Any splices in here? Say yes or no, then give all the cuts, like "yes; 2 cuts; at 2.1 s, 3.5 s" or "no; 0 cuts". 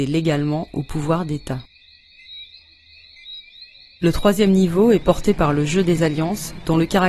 no; 0 cuts